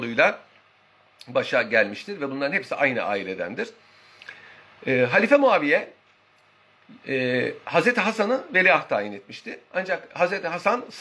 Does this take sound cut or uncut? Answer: uncut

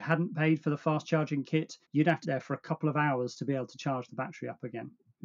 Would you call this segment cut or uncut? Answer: cut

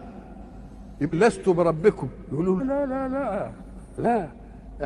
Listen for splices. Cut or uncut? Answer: cut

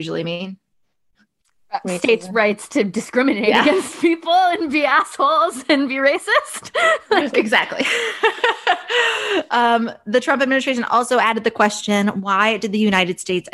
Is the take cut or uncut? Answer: uncut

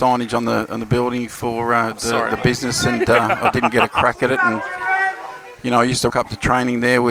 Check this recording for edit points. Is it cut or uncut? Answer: cut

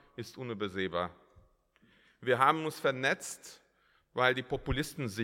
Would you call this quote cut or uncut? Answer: uncut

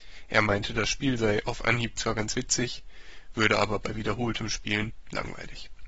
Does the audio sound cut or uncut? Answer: uncut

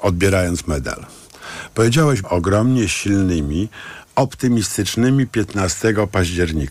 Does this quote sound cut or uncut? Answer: cut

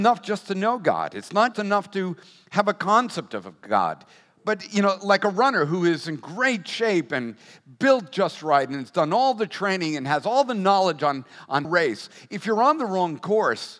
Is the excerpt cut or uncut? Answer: cut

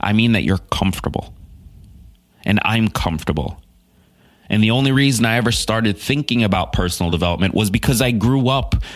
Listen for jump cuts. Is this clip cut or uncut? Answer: uncut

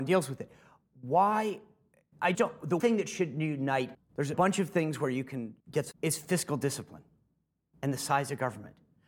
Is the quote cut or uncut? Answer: cut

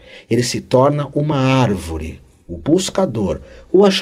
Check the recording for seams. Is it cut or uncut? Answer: uncut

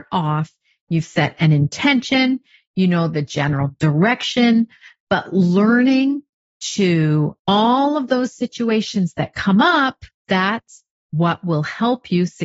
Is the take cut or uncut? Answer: cut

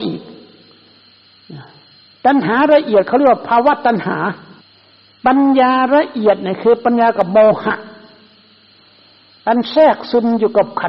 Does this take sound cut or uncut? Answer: cut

